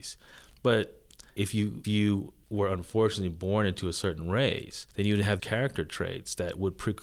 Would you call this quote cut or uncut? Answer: cut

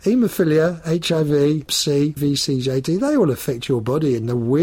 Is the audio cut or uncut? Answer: cut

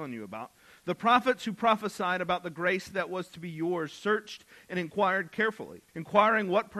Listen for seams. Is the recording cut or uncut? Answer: cut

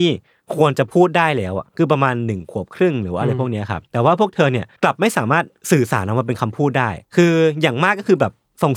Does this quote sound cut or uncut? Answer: cut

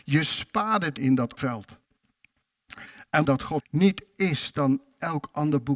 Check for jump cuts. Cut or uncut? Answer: cut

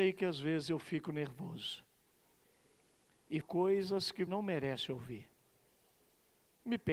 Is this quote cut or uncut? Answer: cut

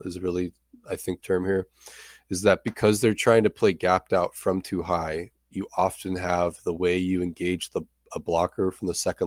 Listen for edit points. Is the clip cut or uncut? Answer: cut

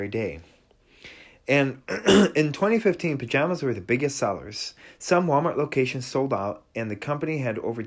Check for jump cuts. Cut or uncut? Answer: uncut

